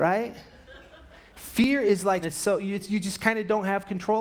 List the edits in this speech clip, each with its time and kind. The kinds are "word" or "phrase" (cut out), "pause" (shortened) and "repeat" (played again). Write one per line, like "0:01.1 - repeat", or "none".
0:02.2 - phrase